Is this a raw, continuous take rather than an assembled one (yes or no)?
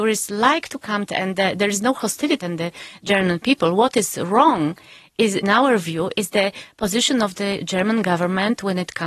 no